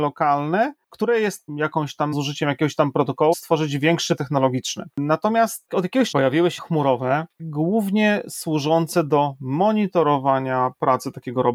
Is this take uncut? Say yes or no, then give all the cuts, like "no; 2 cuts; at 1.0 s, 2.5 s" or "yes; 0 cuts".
no; 8 cuts; at 1.5 s, 2.1 s, 3.3 s, 4.2 s, 5.7 s, 6.1 s, 6.6 s, 7.4 s